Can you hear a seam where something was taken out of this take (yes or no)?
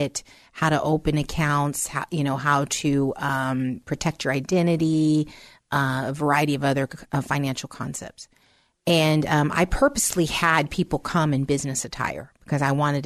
no